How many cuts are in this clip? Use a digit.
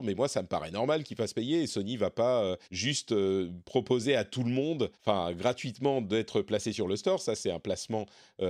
2